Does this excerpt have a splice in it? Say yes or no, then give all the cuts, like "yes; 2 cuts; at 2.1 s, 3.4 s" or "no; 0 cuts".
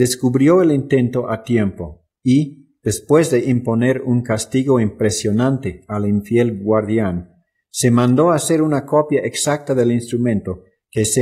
no; 0 cuts